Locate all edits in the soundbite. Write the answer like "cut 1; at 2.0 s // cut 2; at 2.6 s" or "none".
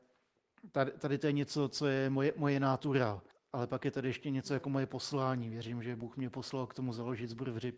cut 1; at 3.3 s